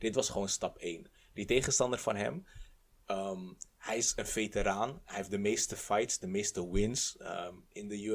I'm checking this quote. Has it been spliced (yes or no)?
no